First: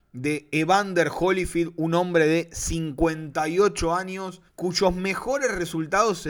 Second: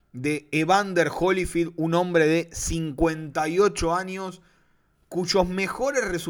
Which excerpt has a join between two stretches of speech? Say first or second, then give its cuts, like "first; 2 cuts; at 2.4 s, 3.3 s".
first; 1 cut; at 4.5 s